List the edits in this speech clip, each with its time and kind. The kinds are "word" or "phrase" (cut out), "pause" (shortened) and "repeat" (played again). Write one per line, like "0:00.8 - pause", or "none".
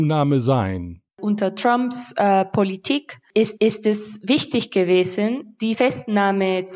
0:01.1 - pause
0:03.6 - repeat